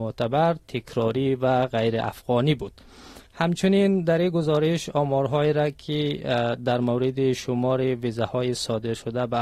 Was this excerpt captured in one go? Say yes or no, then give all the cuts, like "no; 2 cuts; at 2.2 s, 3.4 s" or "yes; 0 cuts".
no; 1 cut; at 3.3 s